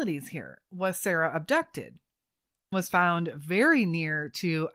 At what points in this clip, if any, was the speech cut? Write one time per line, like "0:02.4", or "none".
0:02.7